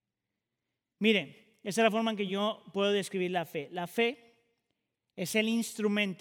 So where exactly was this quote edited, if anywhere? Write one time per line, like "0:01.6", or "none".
none